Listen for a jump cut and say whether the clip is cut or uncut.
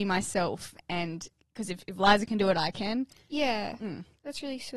uncut